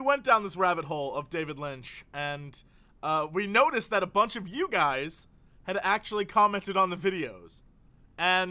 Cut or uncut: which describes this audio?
uncut